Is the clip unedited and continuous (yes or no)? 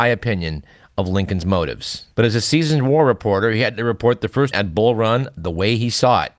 no